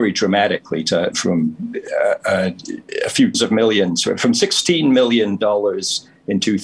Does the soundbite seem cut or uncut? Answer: cut